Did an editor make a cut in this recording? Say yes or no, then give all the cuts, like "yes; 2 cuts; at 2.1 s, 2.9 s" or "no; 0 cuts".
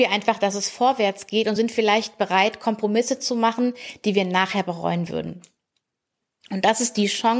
no; 0 cuts